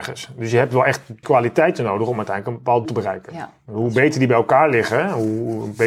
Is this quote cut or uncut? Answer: cut